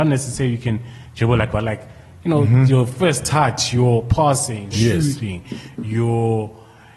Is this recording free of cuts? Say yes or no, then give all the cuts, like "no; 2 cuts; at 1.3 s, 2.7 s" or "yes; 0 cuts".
no; 2 cuts; at 1.5 s, 4.7 s